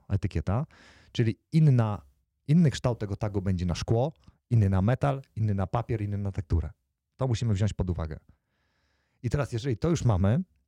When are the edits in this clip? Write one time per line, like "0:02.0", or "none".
none